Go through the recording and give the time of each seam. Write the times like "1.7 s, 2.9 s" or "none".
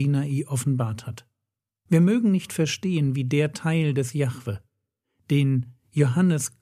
none